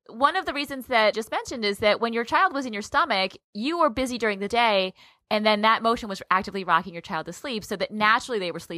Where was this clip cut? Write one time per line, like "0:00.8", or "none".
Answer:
0:01.1